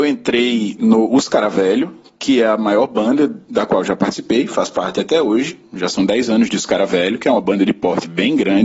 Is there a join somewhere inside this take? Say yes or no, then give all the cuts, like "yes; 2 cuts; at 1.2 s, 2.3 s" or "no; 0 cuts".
no; 0 cuts